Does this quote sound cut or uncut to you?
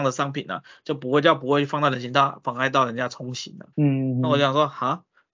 cut